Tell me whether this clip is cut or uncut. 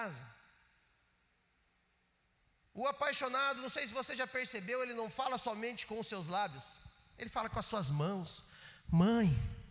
uncut